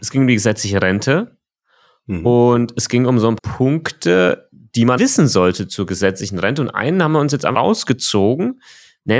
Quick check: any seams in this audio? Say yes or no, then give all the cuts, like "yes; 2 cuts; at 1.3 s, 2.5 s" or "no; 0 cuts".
yes; 3 cuts; at 3.4 s, 5.0 s, 7.5 s